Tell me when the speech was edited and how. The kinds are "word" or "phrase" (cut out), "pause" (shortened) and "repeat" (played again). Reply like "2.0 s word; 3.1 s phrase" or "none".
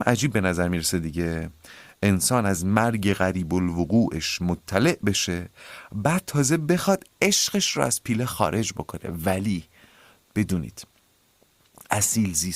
none